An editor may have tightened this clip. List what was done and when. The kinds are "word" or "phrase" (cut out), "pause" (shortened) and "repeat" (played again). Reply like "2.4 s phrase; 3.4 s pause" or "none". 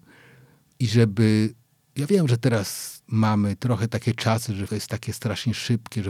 4.7 s word